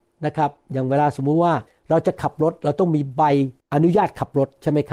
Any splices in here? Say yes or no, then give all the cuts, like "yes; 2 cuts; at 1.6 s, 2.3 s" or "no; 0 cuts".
yes; 2 cuts; at 1.7 s, 3.6 s